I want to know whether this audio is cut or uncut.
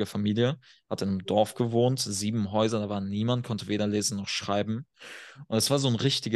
uncut